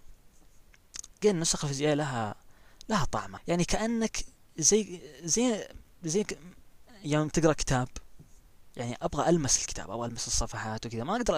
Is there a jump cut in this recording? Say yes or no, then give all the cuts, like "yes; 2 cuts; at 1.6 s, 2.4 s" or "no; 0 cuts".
yes; 2 cuts; at 1.2 s, 3.4 s